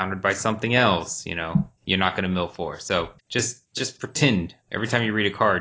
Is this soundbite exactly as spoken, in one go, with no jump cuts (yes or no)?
no